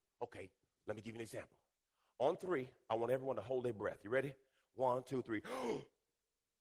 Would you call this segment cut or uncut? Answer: uncut